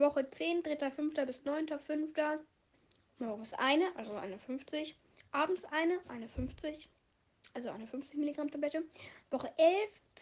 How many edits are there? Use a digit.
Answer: 1